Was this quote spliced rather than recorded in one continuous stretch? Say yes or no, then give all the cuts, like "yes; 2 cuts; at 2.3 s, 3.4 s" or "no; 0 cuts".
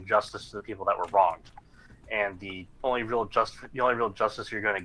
no; 0 cuts